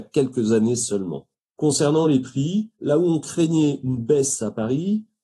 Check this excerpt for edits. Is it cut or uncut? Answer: uncut